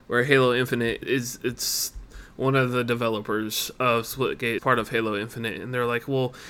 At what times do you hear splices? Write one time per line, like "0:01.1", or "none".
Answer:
0:01.0
0:04.6